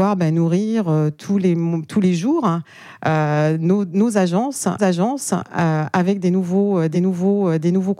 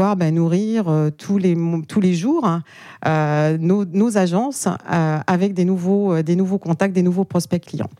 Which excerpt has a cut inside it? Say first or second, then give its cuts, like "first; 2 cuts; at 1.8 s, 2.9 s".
first; 2 cuts; at 4.8 s, 6.9 s